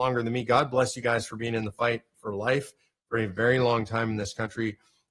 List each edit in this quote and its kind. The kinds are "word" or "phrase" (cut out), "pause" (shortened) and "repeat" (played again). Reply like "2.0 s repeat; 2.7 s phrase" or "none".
none